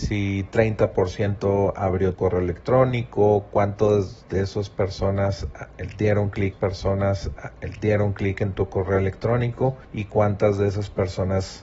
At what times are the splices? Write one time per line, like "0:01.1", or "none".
0:02.1
0:06.5
0:09.8